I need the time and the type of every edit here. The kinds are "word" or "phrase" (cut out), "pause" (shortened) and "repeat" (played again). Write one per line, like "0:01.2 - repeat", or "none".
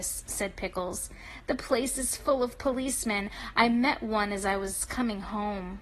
none